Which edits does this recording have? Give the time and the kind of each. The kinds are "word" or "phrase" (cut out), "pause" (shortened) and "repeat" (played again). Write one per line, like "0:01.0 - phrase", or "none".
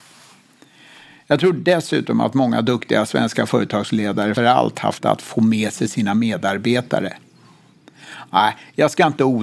0:04.4 - word
0:05.0 - word